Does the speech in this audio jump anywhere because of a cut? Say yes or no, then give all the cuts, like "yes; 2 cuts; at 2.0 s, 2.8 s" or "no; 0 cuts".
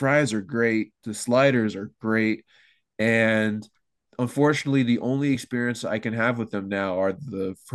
no; 0 cuts